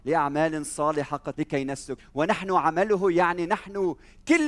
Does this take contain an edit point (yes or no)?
yes